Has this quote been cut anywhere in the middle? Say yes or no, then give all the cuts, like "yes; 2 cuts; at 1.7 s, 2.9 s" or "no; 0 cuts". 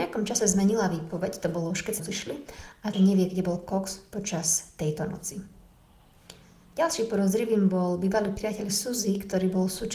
yes; 3 cuts; at 2.0 s, 2.9 s, 6.4 s